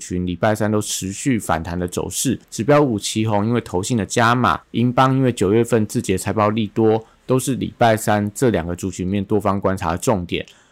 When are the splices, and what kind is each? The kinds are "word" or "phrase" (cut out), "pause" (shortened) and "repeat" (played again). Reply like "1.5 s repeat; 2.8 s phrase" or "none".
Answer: 2.4 s pause; 4.6 s pause